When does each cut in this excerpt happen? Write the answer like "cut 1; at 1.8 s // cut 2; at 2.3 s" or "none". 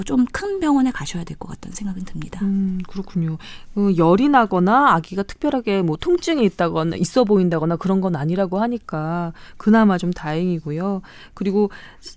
none

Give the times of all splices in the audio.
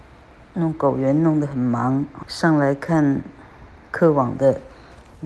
cut 1; at 2.2 s

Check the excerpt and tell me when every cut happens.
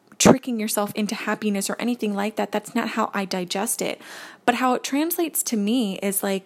none

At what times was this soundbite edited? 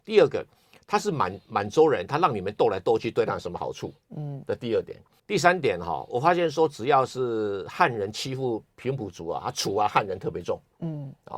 cut 1; at 5.2 s

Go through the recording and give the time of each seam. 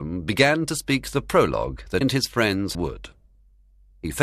cut 1; at 2.0 s // cut 2; at 2.7 s

